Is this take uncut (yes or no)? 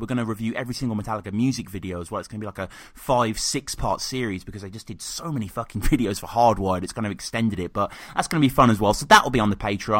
yes